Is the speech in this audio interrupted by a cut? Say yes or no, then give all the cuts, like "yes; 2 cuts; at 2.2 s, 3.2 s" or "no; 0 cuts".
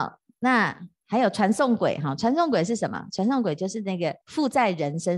yes; 1 cut; at 4.2 s